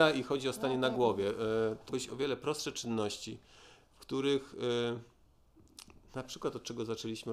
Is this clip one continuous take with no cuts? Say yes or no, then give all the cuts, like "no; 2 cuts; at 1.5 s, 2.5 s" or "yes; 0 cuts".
no; 1 cut; at 1.9 s